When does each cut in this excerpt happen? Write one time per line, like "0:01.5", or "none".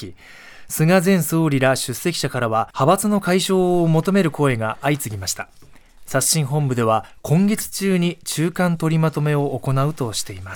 0:02.7